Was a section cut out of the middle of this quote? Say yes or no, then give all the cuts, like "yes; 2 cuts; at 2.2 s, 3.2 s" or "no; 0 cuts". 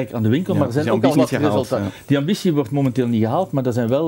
yes; 1 cut; at 1.1 s